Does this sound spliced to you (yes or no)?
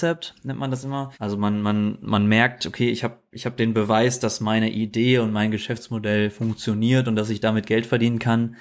yes